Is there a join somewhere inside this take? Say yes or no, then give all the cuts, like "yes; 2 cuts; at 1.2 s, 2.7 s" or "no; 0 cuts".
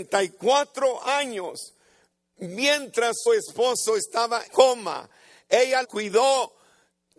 yes; 3 cuts; at 3.3 s, 4.5 s, 5.8 s